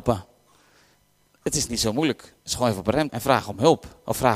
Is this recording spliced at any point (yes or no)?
yes